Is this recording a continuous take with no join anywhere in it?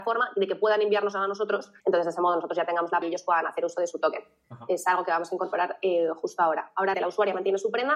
no; 3 cuts; at 1.8 s, 3.0 s, 6.9 s

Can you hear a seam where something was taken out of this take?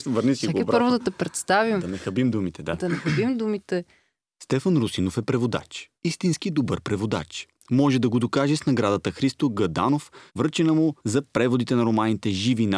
yes; 3 cuts; at 6.0 s, 10.3 s, 11.0 s

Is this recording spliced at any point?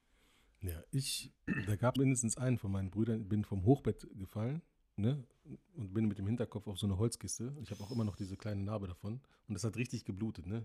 yes; 3 cuts; at 1.4 s, 2.0 s, 9.3 s

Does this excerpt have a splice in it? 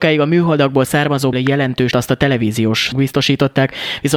yes; 3 cuts; at 1.3 s, 1.9 s, 2.9 s

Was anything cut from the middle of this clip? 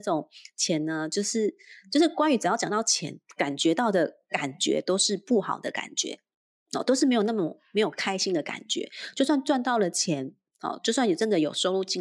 no; 0 cuts

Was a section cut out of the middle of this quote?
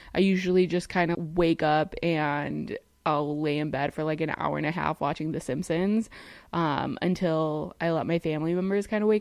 yes; 1 cut; at 1.1 s

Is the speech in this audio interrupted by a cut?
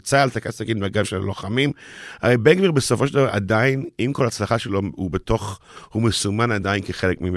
no; 0 cuts

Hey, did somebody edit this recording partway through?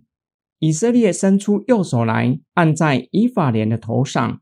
yes; 1 cut; at 2.5 s

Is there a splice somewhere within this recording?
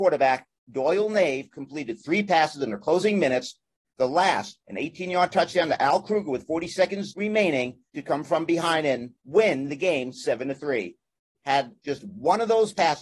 no; 0 cuts

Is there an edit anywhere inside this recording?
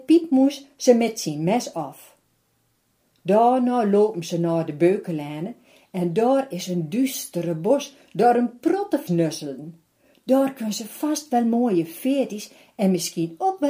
yes; 1 cut; at 9.1 s

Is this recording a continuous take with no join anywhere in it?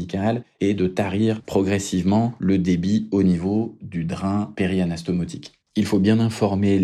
no; 1 cut; at 5.6 s

